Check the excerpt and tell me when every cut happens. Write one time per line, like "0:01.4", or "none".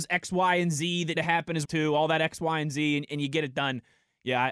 0:01.1
0:01.6